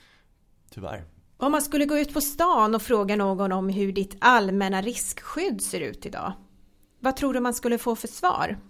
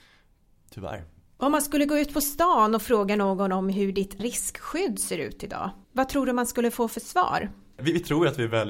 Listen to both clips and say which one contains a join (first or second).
second